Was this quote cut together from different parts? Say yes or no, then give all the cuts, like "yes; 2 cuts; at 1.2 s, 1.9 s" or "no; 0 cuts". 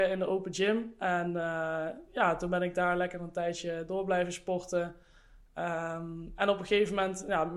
no; 0 cuts